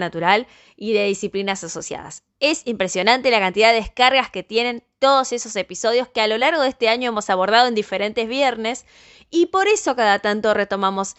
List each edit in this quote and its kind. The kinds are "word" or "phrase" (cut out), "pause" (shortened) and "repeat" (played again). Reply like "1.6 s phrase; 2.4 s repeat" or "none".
none

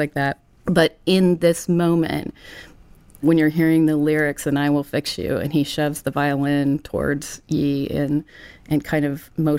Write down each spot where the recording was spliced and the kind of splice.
none

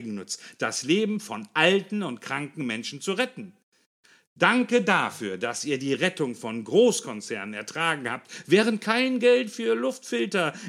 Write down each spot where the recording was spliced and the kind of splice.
none

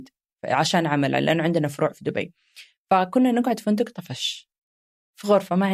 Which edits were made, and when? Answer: none

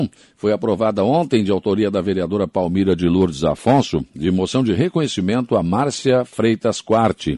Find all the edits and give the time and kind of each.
4.1 s pause

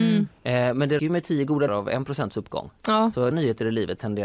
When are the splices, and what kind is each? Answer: 1.0 s word; 1.7 s word; 3.3 s word

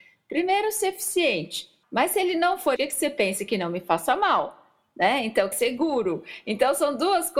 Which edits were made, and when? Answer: 1.8 s word; 2.8 s word; 5.5 s word

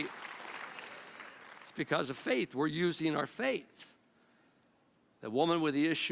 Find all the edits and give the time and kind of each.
none

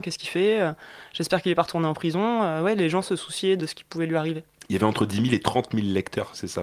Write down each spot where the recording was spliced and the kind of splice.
3.6 s word

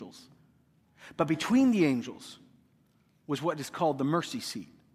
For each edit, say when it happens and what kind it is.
none

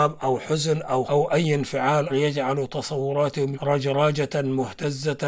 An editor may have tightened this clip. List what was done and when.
1.0 s word; 2.1 s word; 3.5 s word

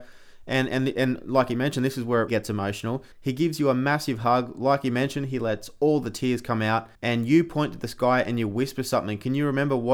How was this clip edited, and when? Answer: 2.3 s word; 3.1 s pause; 6.9 s pause

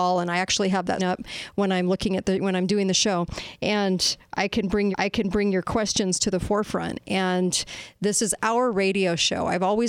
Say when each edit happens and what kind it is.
1.0 s word; 4.9 s repeat

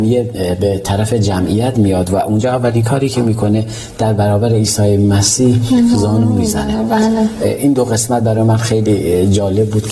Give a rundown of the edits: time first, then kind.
none

